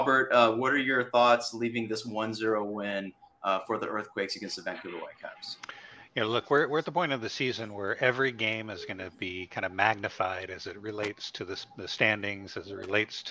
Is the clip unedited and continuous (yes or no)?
yes